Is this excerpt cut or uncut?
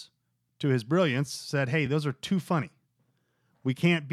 uncut